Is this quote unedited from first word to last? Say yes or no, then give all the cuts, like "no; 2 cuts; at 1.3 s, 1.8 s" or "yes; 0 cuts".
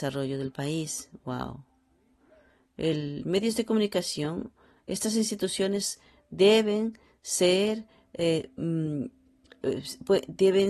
yes; 0 cuts